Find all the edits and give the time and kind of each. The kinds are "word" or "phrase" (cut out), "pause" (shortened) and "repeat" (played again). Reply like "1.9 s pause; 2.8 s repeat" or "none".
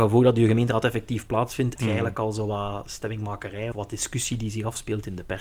1.8 s phrase; 3.7 s word